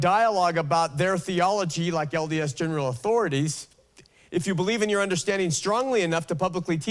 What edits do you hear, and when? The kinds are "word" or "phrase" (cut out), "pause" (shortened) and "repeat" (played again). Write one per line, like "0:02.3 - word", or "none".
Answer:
none